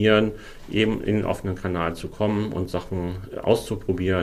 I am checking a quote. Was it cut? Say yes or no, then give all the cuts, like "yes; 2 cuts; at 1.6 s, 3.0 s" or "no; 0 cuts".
no; 0 cuts